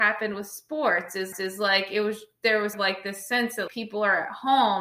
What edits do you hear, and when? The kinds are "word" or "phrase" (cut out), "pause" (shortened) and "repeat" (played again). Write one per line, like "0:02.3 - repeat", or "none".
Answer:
0:01.3 - repeat
0:02.7 - phrase
0:03.7 - word